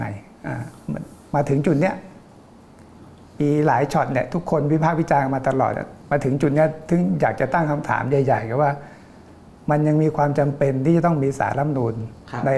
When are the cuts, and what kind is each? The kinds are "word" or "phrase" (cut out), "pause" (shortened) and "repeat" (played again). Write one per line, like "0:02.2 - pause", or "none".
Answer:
0:06.0 - pause